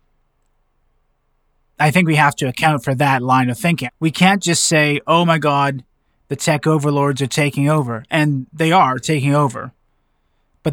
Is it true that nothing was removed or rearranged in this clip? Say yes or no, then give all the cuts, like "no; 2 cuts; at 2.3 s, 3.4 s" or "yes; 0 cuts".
yes; 0 cuts